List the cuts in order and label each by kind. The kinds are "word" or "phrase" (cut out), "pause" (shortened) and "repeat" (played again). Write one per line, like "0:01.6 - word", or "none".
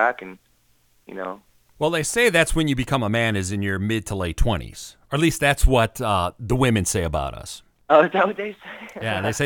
none